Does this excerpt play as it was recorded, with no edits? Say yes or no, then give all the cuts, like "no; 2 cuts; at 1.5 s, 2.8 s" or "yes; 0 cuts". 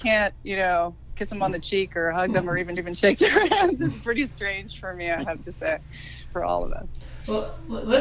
no; 1 cut; at 2.8 s